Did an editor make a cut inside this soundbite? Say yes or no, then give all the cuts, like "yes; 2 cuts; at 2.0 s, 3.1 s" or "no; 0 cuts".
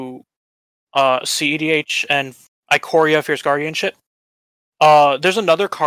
no; 0 cuts